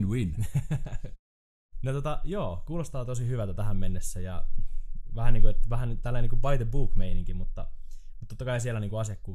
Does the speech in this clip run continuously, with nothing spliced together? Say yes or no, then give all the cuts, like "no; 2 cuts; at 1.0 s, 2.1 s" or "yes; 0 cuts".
yes; 0 cuts